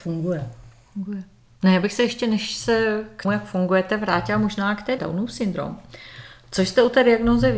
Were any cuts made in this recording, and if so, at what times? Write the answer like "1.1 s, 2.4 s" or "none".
3.2 s, 5.0 s